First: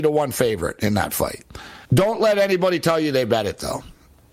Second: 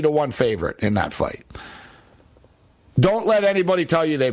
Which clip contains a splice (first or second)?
first